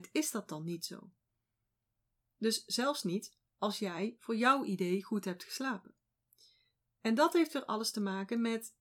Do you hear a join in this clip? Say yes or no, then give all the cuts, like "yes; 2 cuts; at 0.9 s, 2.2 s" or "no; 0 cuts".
no; 0 cuts